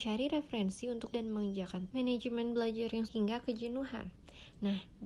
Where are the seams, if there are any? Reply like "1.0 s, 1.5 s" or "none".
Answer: 1.1 s, 1.9 s, 3.1 s